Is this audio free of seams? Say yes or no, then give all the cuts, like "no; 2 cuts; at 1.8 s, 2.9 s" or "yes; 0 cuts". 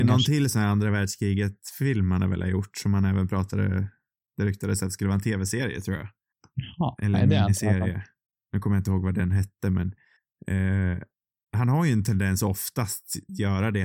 yes; 0 cuts